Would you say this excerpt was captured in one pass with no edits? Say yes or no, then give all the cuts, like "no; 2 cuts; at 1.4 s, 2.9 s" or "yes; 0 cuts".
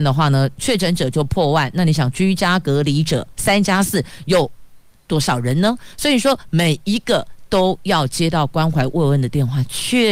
yes; 0 cuts